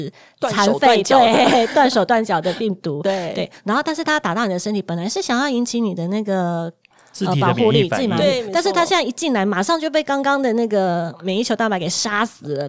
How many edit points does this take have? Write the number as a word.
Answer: zero